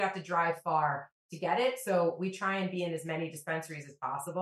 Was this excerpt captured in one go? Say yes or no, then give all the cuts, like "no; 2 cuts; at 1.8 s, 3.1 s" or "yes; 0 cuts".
yes; 0 cuts